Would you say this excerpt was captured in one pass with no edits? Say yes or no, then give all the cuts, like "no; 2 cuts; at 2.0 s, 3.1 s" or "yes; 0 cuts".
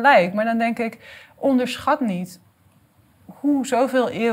yes; 0 cuts